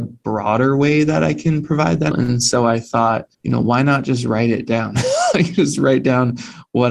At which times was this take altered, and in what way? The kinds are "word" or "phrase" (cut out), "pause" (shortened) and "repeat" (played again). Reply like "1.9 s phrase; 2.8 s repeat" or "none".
2.1 s phrase; 3.3 s pause